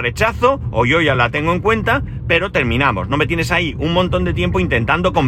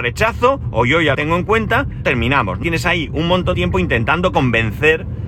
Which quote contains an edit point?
second; 4 cuts; at 1.1 s, 2.0 s, 2.6 s, 3.5 s

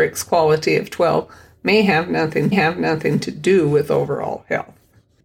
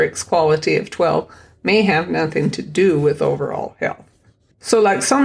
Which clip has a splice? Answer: first; 1 cut; at 2.5 s

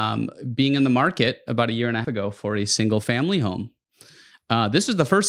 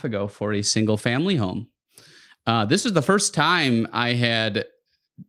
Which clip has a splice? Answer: first; 1 cut; at 2.0 s

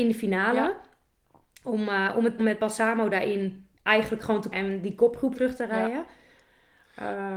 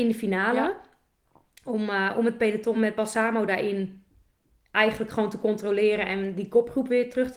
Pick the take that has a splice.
first; 4 cuts; at 2.4 s, 3.8 s, 4.5 s, 5.3 s

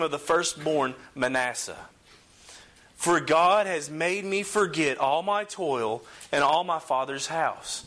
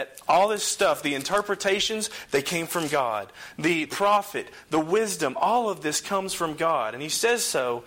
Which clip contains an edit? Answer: second; 1 cut; at 3.9 s

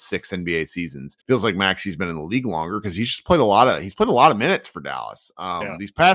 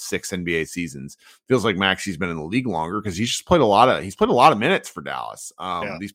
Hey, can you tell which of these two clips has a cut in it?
first; 1 cut; at 1.2 s

